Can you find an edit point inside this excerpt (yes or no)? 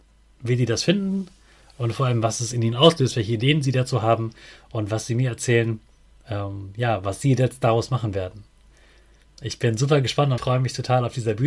yes